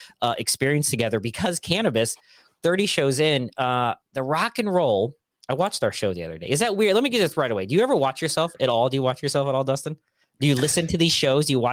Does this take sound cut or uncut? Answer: uncut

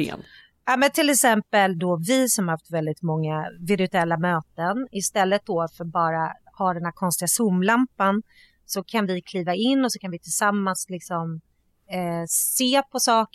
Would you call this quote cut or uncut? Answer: uncut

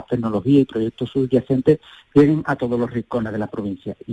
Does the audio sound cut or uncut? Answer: uncut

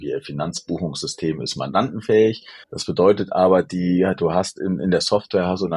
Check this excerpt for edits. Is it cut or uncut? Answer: cut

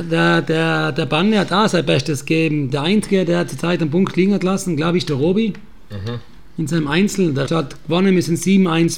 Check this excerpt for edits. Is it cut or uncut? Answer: cut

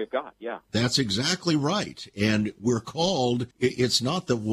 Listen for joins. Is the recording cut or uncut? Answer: cut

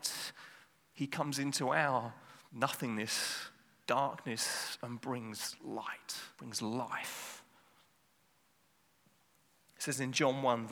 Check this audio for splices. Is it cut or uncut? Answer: cut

